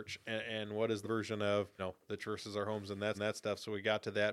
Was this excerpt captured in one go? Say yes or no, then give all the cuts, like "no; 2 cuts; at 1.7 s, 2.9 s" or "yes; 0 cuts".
no; 4 cuts; at 1.0 s, 1.8 s, 2.2 s, 3.1 s